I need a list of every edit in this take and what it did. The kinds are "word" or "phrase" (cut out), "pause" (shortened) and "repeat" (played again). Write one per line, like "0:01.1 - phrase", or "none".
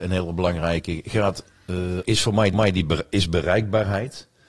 0:02.0 - word
0:02.5 - repeat

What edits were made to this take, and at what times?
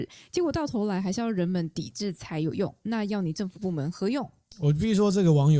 none

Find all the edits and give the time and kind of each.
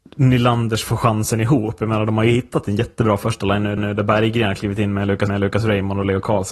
0:03.8 - repeat
0:05.3 - repeat

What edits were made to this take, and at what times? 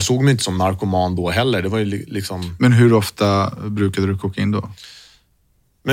none

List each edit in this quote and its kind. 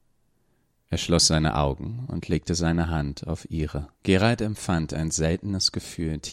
0:03.9 - pause

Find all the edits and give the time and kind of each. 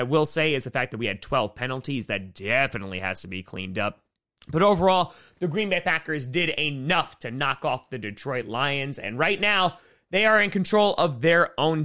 none

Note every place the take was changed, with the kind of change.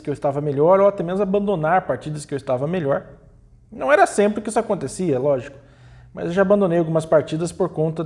none

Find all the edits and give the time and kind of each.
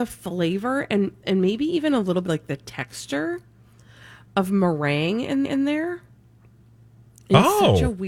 0:02.3 - word
0:05.4 - repeat

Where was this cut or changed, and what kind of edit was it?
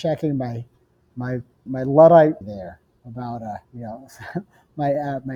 0:01.7 - word
0:02.4 - word
0:03.6 - pause

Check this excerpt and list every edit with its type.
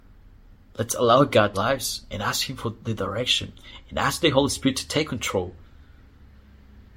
0:01.5 - phrase

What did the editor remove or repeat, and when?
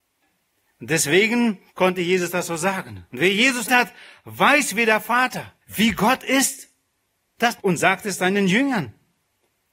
0:01.7 - pause
0:03.7 - word
0:05.6 - pause
0:07.6 - phrase

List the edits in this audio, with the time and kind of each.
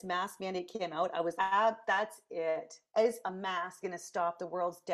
0:01.4 - word
0:03.2 - word
0:03.8 - word

